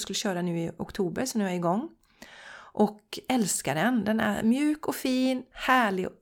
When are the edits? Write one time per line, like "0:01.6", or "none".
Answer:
none